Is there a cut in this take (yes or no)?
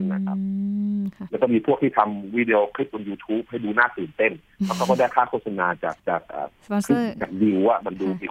yes